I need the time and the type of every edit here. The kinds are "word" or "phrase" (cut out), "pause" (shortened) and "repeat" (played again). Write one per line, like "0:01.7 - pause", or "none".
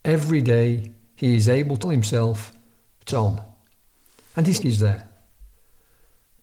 0:01.8 - word
0:03.1 - word
0:04.6 - word